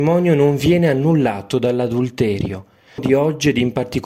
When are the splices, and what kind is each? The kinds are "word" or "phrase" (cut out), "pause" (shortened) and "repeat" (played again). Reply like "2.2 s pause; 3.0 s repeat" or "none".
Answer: 3.0 s word